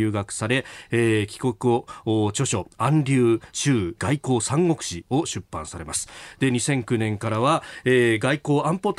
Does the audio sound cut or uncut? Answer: cut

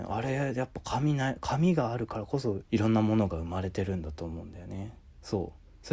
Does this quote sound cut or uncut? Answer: cut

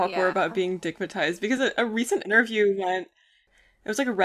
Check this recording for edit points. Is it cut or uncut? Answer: uncut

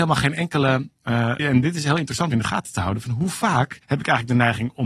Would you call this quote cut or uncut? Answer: cut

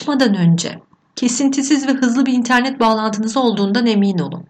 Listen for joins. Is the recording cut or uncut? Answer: uncut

